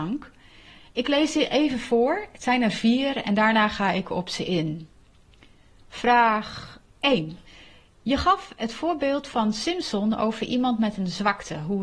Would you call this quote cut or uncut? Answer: uncut